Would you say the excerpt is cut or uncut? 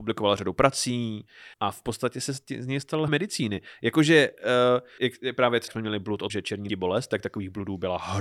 cut